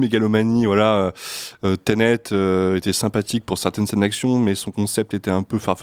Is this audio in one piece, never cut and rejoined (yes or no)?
yes